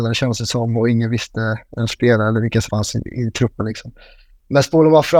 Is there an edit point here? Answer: yes; 2 cuts; at 1.9 s, 2.7 s

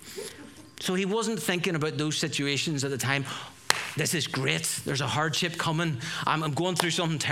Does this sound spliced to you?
no; 0 cuts

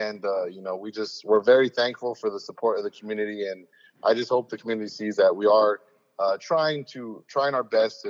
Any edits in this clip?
no; 0 cuts

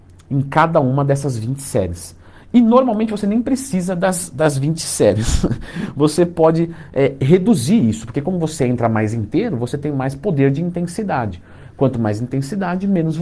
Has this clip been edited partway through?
no; 0 cuts

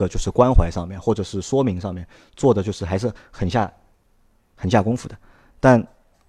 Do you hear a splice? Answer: no; 0 cuts

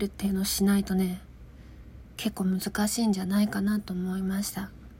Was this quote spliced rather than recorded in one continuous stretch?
yes; 1 cut; at 2.1 s

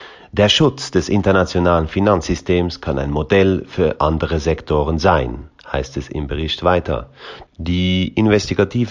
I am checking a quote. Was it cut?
no; 0 cuts

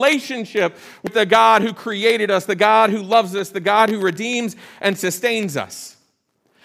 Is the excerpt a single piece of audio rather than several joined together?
yes; 0 cuts

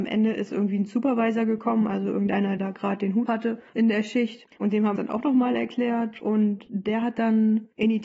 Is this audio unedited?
no; 4 cuts; at 2.6 s, 3.3 s, 3.7 s, 5.0 s

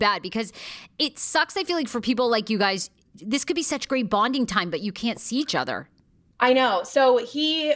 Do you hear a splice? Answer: no; 0 cuts

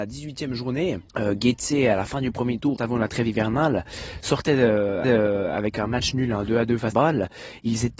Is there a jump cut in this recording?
yes; 4 cuts; at 1.1 s, 2.8 s, 5.0 s, 6.9 s

